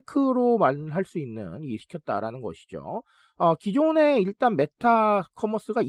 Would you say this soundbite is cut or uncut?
cut